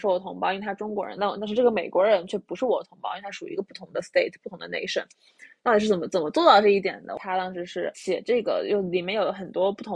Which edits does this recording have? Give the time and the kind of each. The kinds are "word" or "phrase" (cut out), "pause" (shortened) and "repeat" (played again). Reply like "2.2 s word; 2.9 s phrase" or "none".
none